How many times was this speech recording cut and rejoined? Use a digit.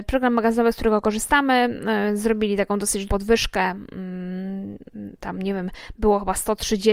1